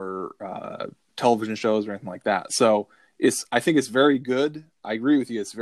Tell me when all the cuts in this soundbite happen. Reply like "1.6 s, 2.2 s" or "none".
none